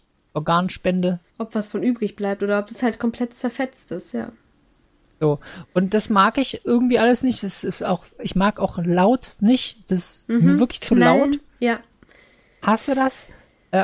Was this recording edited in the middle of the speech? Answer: yes; 1 cut; at 1.3 s

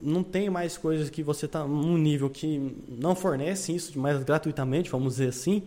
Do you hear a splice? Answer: no; 0 cuts

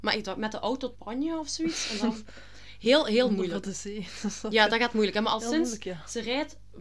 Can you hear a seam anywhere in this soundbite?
yes; 1 cut; at 0.9 s

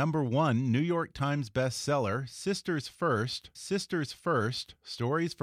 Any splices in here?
yes; 1 cut; at 3.5 s

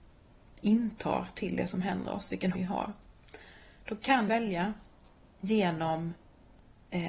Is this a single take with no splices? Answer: no; 2 cuts; at 2.5 s, 4.3 s

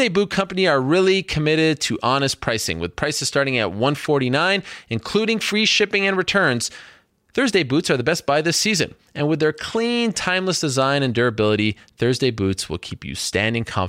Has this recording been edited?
no; 0 cuts

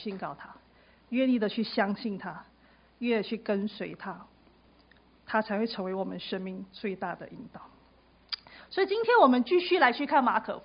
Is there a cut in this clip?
no; 0 cuts

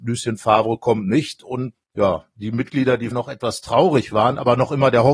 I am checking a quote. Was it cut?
yes; 2 cuts; at 1.7 s, 3.1 s

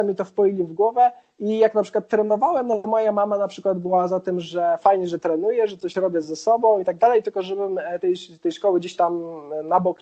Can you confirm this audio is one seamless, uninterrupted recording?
yes; 0 cuts

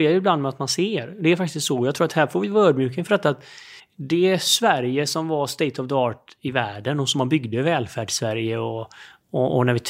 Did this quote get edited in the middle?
yes; 1 cut; at 3.8 s

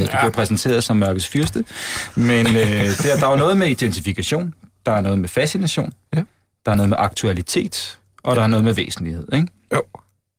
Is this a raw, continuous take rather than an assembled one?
yes; 0 cuts

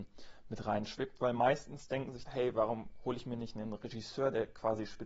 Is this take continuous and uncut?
no; 1 cut; at 2.2 s

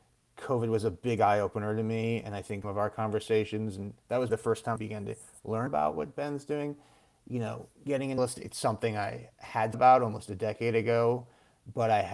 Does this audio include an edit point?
yes; 6 cuts; at 2.6 s, 4.3 s, 4.8 s, 5.7 s, 8.2 s, 9.7 s

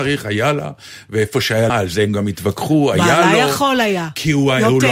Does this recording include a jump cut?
yes; 1 cut; at 1.7 s

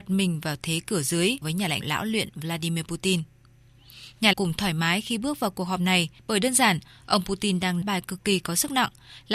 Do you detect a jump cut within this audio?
yes; 5 cuts; at 1.4 s, 1.8 s, 4.3 s, 6.2 s, 7.8 s

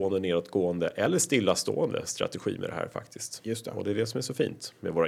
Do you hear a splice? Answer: no; 0 cuts

